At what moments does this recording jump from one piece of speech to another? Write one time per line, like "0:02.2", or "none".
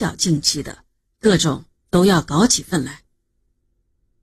none